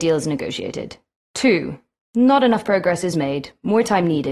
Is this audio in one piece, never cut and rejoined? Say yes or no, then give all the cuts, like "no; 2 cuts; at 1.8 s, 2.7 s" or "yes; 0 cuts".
yes; 0 cuts